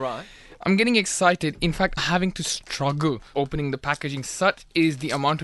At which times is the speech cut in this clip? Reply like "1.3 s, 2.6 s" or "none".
2.0 s, 3.3 s